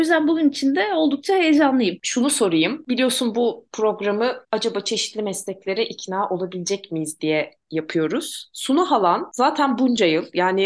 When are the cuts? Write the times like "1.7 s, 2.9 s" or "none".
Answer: 4.4 s